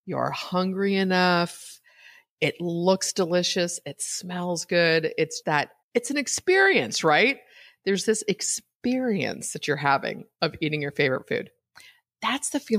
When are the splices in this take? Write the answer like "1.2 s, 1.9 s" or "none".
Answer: 5.4 s, 5.8 s